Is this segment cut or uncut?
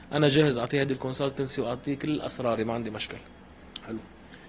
uncut